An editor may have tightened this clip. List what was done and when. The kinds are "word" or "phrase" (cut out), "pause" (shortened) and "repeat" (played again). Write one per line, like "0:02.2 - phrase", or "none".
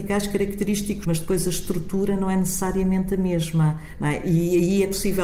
0:01.0 - phrase